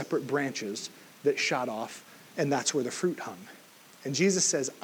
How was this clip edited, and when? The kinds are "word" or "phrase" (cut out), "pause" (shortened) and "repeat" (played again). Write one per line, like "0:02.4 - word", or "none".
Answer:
none